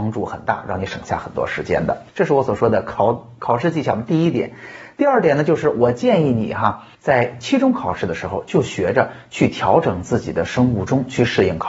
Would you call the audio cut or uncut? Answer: cut